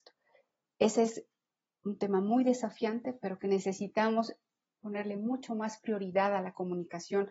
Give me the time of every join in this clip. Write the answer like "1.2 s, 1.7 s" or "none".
none

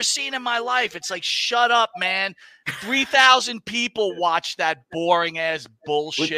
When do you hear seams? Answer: none

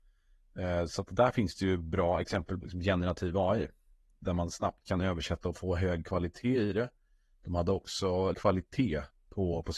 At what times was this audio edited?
2.6 s, 8.3 s

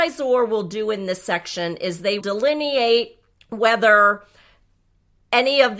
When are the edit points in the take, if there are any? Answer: 2.2 s, 3.3 s

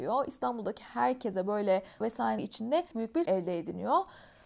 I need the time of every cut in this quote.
2.0 s, 2.4 s, 2.9 s, 3.3 s

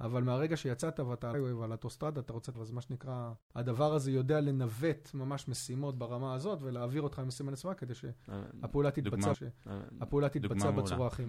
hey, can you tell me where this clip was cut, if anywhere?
1.3 s, 2.5 s, 3.4 s, 9.3 s

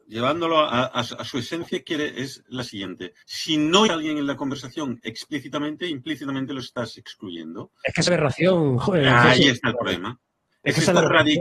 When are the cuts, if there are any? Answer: 3.2 s, 3.9 s, 8.1 s

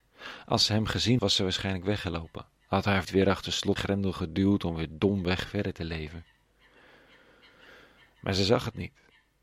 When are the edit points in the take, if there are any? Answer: 1.2 s, 3.0 s, 3.8 s

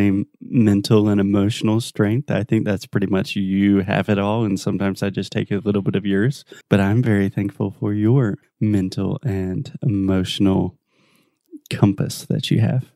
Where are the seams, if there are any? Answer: 6.6 s, 8.4 s

